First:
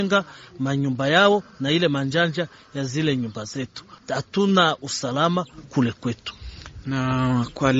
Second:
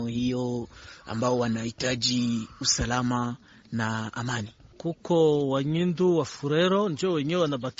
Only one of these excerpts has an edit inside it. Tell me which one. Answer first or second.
first